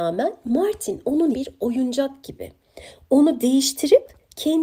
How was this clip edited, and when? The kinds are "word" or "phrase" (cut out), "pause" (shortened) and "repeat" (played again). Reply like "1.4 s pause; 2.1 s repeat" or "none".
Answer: 1.3 s word